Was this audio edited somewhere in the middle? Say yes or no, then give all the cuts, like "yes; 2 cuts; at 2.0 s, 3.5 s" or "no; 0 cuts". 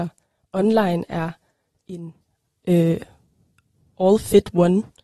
no; 0 cuts